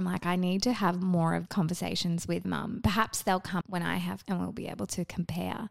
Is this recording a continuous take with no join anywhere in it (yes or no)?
no